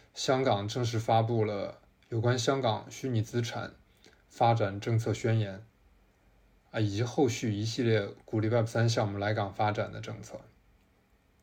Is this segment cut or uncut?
uncut